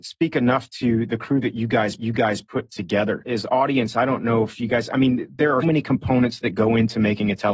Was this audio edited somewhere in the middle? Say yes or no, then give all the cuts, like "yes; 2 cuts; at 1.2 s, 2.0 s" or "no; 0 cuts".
yes; 2 cuts; at 2.0 s, 5.6 s